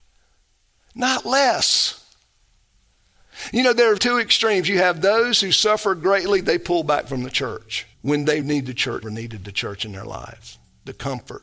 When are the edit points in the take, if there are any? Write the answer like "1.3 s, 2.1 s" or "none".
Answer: 4.0 s, 7.9 s, 8.4 s, 9.0 s